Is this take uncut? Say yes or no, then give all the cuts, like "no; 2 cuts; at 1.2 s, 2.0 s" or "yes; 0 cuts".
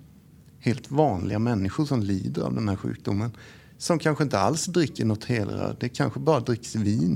yes; 0 cuts